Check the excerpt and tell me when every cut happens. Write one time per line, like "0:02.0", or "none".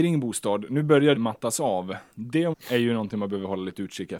0:01.2
0:02.5